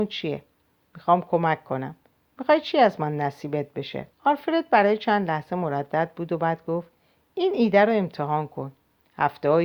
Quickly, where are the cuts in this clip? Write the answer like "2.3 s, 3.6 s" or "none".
4.1 s